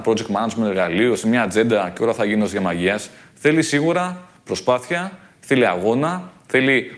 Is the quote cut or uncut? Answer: uncut